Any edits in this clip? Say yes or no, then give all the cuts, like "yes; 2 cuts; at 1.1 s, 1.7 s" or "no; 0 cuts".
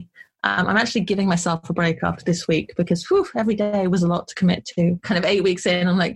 no; 0 cuts